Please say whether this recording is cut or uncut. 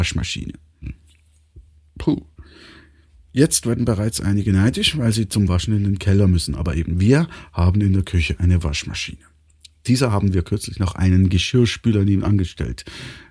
uncut